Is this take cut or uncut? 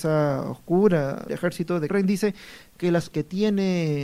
cut